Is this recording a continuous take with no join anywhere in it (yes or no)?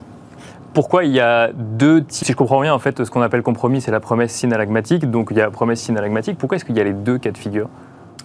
no